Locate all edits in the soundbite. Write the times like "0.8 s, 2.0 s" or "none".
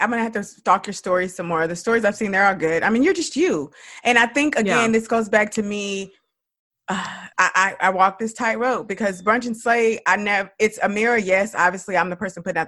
7.3 s